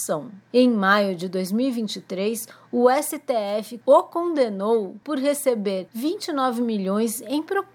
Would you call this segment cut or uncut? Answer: uncut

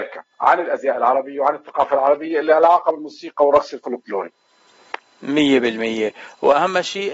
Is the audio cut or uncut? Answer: uncut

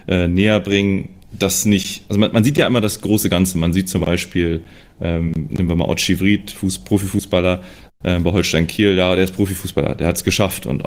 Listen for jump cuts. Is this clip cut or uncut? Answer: uncut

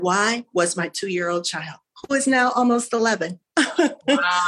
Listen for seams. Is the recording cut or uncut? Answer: uncut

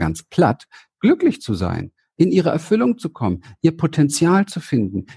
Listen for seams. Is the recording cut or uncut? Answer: uncut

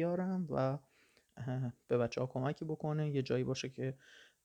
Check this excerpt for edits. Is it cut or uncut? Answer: uncut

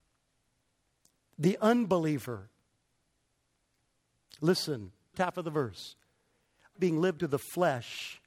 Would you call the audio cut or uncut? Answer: cut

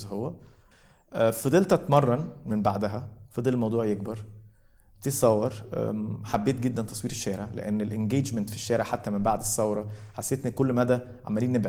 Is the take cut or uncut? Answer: uncut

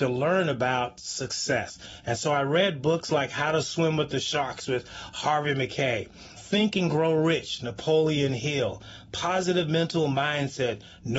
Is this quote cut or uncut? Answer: cut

